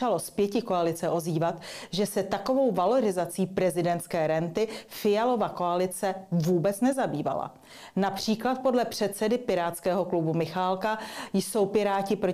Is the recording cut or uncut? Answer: uncut